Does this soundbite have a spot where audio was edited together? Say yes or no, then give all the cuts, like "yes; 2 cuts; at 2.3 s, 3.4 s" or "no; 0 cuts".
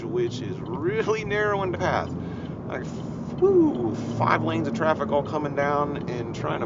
yes; 2 cuts; at 1.7 s, 2.8 s